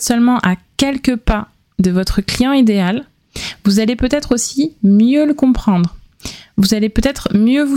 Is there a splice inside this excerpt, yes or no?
no